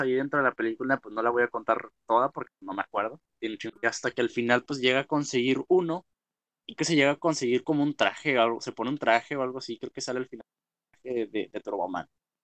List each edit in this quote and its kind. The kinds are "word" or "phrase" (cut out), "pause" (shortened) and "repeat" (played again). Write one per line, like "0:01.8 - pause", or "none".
0:03.8 - phrase
0:06.8 - word